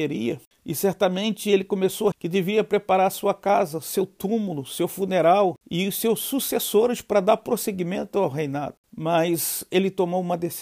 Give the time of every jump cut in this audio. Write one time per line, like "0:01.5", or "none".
0:02.1